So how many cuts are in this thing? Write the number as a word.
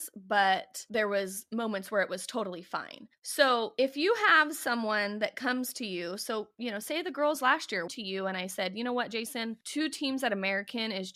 one